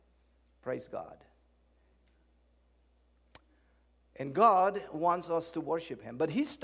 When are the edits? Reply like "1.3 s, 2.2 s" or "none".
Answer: none